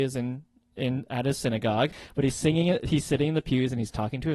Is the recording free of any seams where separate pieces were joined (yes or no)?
yes